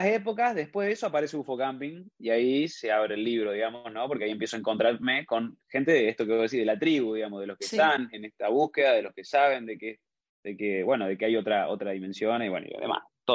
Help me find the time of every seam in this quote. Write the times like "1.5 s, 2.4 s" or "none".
none